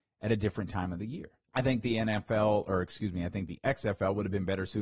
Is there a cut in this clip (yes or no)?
yes